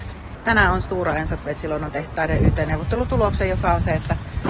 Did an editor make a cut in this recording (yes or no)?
yes